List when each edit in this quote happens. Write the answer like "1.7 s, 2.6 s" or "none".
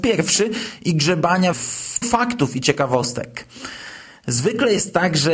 1.5 s, 2.0 s